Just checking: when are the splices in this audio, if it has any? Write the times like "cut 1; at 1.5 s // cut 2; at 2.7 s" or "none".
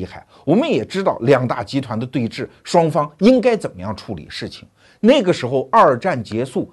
none